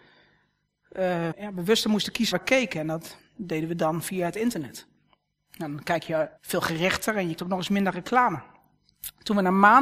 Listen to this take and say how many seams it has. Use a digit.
4